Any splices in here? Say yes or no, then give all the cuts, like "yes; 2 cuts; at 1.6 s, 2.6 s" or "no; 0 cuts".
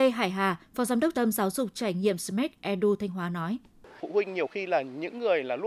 yes; 1 cut; at 1.1 s